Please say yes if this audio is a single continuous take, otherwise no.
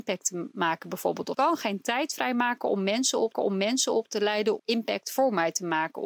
no